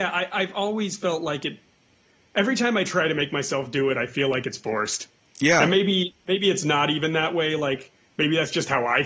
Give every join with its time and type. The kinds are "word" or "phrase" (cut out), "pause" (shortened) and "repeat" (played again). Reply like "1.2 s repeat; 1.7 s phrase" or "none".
none